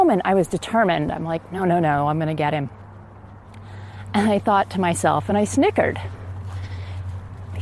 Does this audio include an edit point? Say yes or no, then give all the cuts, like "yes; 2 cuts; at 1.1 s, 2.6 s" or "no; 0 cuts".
no; 0 cuts